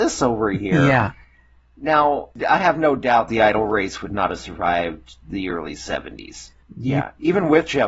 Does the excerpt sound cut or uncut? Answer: uncut